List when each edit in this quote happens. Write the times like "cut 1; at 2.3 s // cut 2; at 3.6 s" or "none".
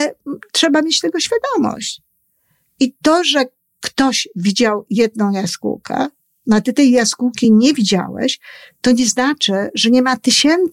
none